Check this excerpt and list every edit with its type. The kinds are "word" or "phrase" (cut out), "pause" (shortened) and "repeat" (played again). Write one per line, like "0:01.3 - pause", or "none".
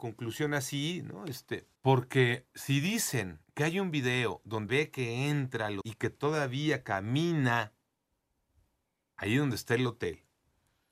0:01.7 - pause
0:03.4 - pause
0:04.7 - word
0:05.8 - word